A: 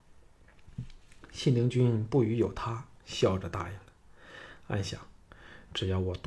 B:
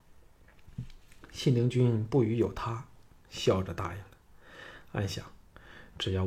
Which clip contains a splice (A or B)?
A